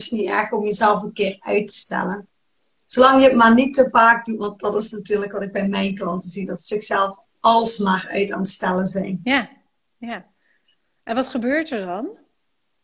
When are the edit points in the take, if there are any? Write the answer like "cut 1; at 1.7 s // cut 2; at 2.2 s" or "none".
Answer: none